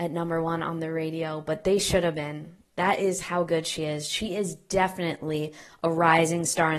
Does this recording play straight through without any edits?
yes; 0 cuts

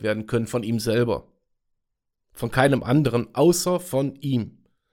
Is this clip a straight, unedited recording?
yes; 0 cuts

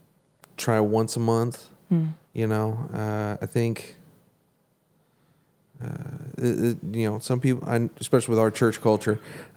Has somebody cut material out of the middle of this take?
no; 0 cuts

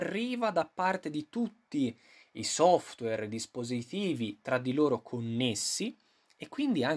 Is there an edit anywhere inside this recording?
no; 0 cuts

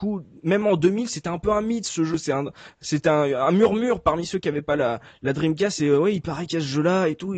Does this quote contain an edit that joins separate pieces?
no; 0 cuts

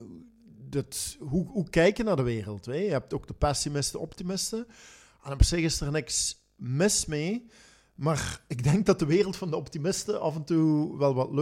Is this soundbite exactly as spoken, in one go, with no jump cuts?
yes; 0 cuts

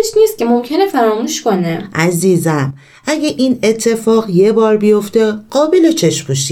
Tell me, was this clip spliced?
no; 0 cuts

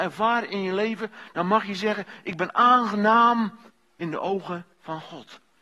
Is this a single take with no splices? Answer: no; 2 cuts; at 3.7 s, 4.7 s

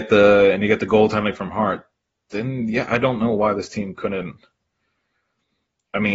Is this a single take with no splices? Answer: yes; 0 cuts

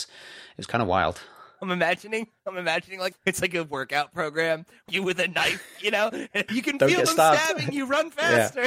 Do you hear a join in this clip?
yes; 3 cuts; at 3.1 s, 4.9 s, 6.5 s

